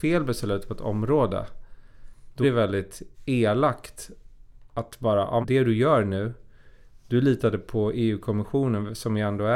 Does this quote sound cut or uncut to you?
cut